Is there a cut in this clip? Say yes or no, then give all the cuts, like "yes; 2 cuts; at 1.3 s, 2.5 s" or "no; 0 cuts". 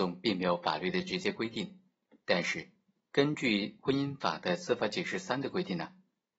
no; 0 cuts